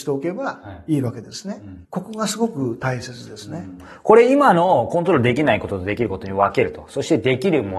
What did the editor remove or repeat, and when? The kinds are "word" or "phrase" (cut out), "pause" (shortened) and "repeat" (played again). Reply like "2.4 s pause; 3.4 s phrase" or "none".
1.8 s pause